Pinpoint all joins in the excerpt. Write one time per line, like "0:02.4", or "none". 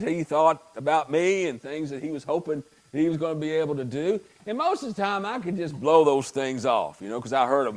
none